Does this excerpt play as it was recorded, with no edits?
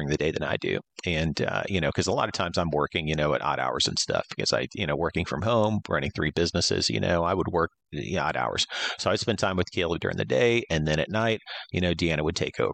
yes; 0 cuts

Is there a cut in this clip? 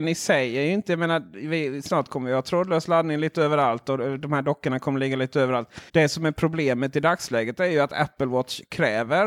yes; 1 cut; at 5.9 s

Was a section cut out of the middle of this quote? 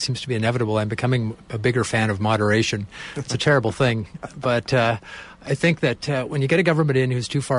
no; 0 cuts

